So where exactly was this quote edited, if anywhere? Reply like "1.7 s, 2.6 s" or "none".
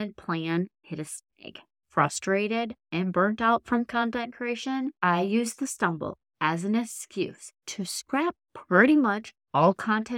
8.4 s